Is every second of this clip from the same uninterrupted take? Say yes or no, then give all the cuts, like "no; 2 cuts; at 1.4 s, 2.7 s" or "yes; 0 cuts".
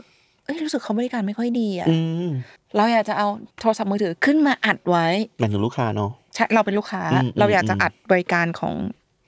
no; 2 cuts; at 2.6 s, 3.5 s